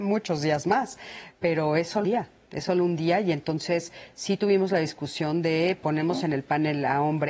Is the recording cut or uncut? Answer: cut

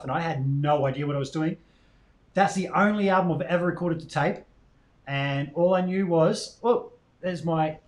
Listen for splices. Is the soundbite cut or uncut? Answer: uncut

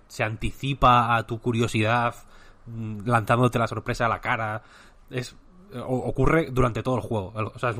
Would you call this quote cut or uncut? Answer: uncut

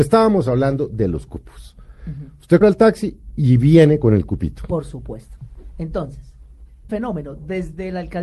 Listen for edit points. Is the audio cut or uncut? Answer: cut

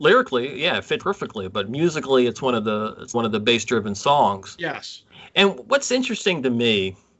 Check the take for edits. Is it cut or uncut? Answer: cut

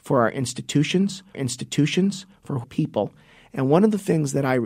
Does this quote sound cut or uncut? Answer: cut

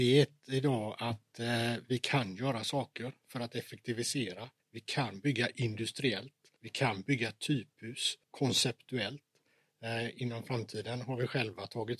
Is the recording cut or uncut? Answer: cut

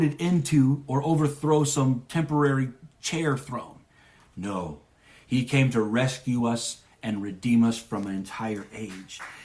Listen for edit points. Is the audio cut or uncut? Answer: uncut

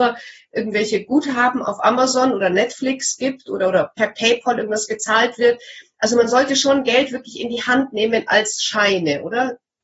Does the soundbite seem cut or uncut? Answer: uncut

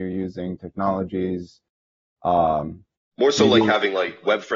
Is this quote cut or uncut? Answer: uncut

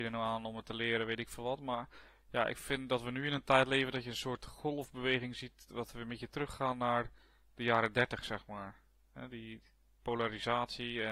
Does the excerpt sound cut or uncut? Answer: uncut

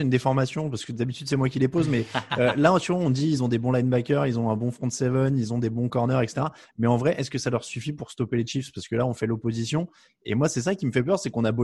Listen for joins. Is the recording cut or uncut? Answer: uncut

